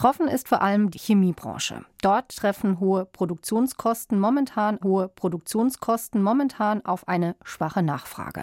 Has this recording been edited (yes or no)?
yes